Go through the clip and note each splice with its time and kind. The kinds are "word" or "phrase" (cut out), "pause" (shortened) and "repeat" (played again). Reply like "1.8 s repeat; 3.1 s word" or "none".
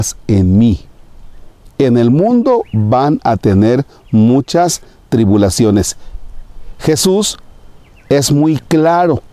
none